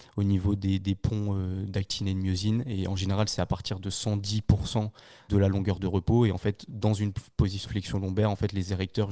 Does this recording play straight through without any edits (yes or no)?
no